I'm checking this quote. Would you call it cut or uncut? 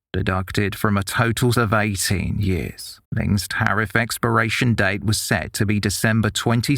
cut